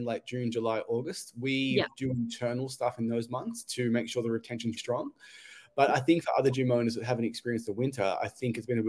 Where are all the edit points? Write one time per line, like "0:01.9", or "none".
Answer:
0:04.8